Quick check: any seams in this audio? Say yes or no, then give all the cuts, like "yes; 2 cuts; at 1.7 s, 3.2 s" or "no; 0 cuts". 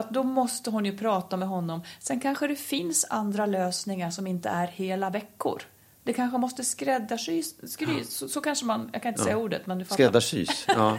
no; 0 cuts